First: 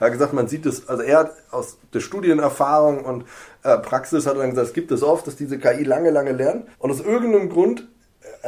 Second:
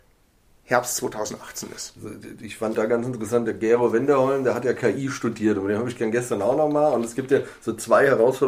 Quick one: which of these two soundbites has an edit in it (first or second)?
first